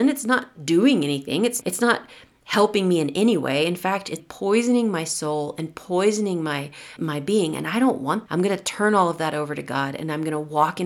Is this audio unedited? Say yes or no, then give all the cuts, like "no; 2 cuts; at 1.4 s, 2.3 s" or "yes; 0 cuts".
no; 4 cuts; at 1.6 s, 4.2 s, 7.0 s, 8.3 s